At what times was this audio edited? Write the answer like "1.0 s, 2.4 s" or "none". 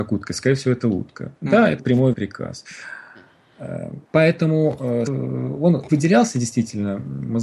1.4 s, 1.8 s, 2.1 s, 4.1 s, 5.1 s, 5.9 s